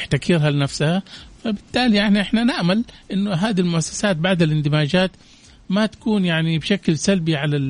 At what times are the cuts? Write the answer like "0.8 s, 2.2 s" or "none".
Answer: none